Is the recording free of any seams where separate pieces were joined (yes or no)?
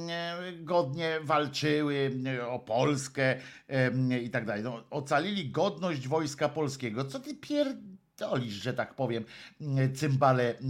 yes